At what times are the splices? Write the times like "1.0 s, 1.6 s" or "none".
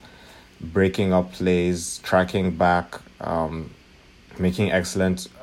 none

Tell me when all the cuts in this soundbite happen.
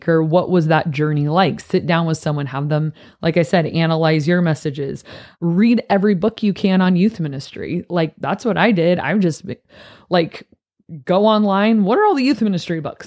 none

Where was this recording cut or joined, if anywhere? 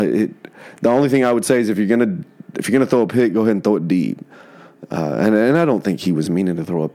none

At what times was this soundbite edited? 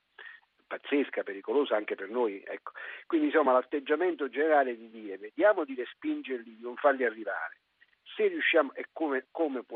none

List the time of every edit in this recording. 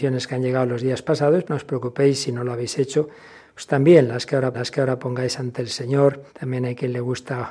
1.4 s, 4.5 s, 6.3 s

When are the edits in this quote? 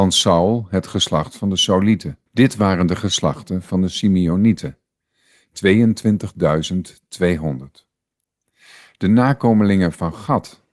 2.3 s

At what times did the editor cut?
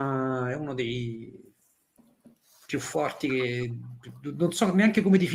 none

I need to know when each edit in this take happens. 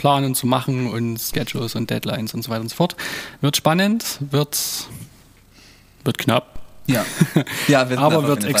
none

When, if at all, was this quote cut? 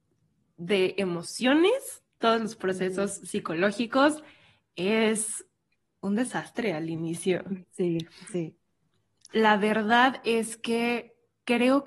none

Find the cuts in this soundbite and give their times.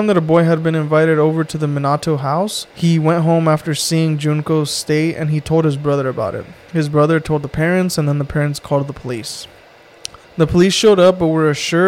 2.7 s, 10.2 s

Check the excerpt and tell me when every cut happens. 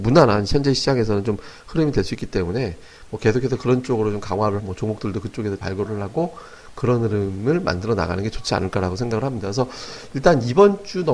4.6 s, 5.6 s

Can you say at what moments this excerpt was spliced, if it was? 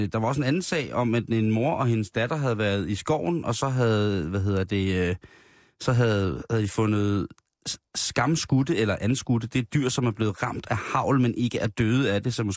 none

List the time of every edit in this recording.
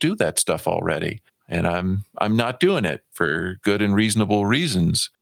1.3 s

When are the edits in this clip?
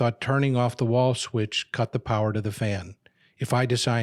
none

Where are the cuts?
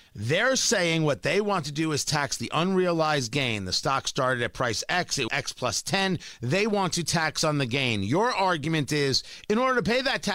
5.3 s

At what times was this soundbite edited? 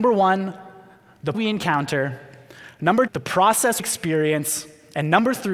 1.3 s, 3.1 s, 3.8 s

